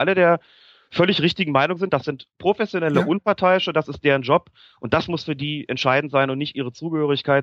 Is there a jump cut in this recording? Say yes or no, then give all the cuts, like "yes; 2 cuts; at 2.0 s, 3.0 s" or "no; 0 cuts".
no; 0 cuts